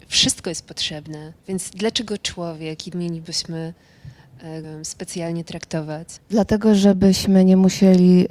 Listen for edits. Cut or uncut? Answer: cut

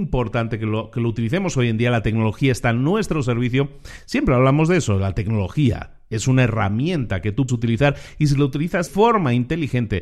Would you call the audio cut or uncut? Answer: cut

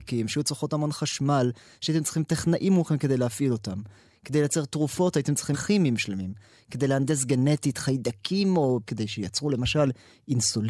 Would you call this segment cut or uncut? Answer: cut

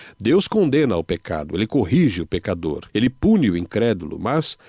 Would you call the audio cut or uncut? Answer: cut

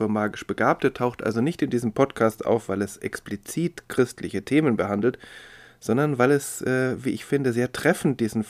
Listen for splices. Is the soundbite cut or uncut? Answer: uncut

